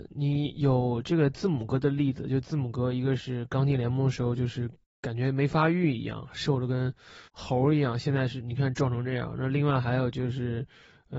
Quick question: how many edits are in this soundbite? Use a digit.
1